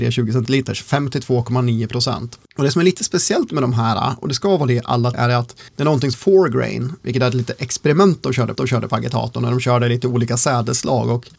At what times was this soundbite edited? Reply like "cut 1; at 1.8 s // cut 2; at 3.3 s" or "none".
cut 1; at 2.5 s // cut 2; at 5.1 s // cut 3; at 5.7 s // cut 4; at 6.1 s // cut 5; at 8.6 s